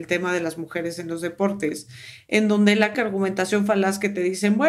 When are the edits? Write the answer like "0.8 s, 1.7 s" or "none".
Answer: 2.9 s